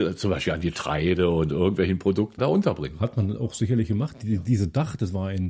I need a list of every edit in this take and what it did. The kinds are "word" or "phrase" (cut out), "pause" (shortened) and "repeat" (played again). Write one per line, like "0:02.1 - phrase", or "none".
0:02.4 - word